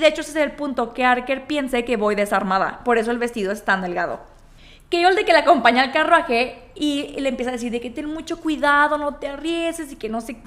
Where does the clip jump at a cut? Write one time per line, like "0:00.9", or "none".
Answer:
0:04.6